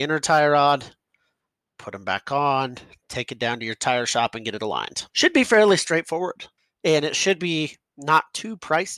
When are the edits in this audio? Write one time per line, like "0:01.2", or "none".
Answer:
0:05.1
0:06.6